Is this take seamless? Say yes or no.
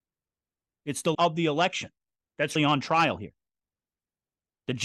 no